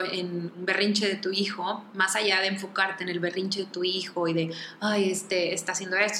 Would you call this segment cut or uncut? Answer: uncut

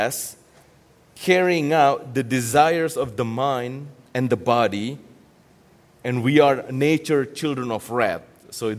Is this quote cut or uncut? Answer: uncut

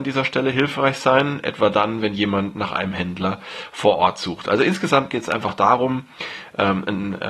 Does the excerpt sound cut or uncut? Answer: uncut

